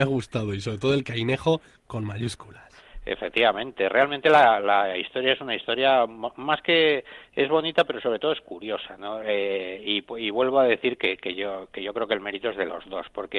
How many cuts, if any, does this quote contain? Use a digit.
0